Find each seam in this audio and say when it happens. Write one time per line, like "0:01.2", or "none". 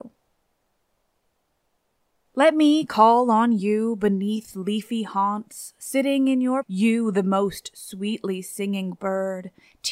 0:06.6